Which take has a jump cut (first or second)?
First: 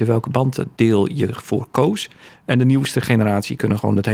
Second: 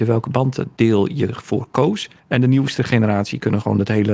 second